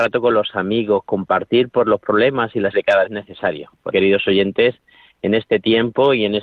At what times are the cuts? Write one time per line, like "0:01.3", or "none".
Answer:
0:02.7
0:03.1
0:03.9